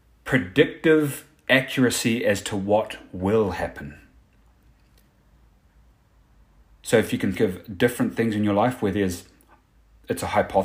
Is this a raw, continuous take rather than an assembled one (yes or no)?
no